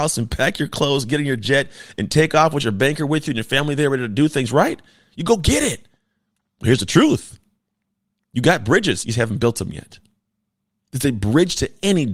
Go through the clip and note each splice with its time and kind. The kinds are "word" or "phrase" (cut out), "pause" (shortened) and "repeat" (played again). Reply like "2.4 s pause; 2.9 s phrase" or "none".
none